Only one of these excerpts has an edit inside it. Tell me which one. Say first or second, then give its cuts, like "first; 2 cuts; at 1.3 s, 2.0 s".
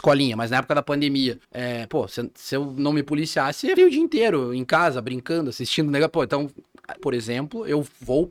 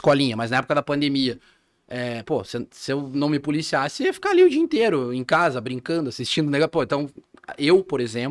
first; 3 cuts; at 1.4 s, 3.8 s, 7.0 s